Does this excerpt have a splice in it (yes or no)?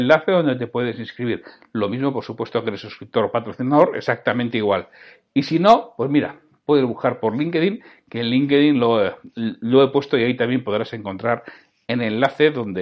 no